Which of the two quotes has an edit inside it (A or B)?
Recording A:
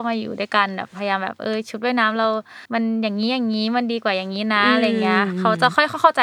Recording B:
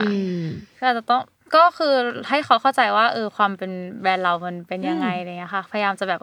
A